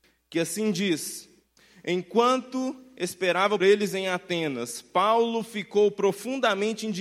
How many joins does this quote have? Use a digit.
1